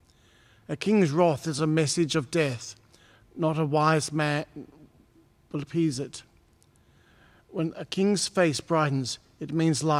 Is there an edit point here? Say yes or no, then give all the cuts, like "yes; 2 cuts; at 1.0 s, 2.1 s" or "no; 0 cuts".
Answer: no; 0 cuts